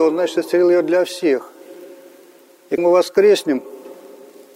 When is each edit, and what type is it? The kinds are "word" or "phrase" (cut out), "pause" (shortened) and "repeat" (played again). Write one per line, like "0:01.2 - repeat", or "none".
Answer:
0:02.8 - word